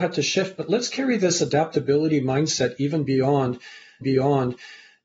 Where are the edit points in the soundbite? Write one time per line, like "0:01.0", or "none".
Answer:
0:04.0